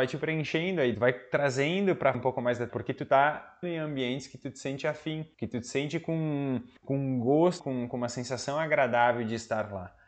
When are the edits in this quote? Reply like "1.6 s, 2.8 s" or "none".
0.9 s, 2.1 s, 2.7 s, 3.6 s, 5.3 s, 6.8 s, 7.6 s